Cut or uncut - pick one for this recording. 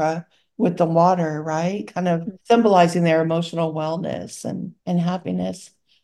cut